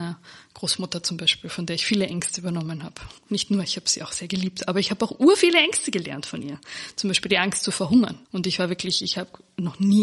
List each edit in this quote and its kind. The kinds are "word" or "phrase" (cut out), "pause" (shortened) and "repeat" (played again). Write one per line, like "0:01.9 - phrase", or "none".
0:03.2 - pause
0:08.2 - pause